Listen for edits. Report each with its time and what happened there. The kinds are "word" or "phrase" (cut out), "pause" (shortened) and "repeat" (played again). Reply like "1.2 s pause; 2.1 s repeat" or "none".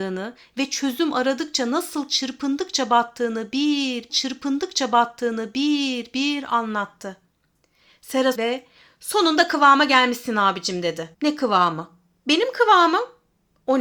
4.1 s repeat; 8.3 s phrase; 11.1 s pause

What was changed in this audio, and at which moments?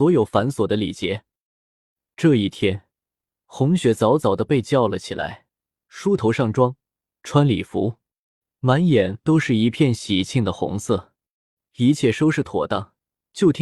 none

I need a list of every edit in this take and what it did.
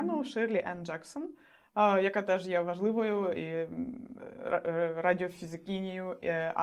none

